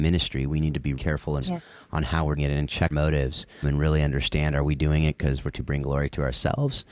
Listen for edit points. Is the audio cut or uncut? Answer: cut